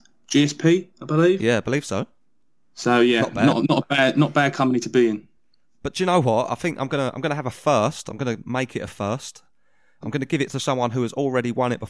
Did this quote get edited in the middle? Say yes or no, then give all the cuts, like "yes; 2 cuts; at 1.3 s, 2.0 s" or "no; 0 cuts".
no; 0 cuts